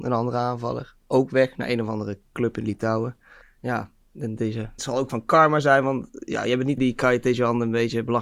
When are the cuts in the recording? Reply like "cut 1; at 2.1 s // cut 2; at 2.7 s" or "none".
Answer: cut 1; at 3.4 s // cut 2; at 4.8 s // cut 3; at 5.1 s // cut 4; at 6.8 s